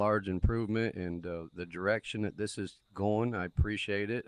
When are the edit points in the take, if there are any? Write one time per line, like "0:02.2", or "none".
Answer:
none